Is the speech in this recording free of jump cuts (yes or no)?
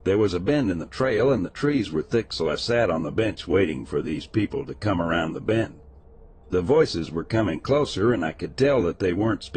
yes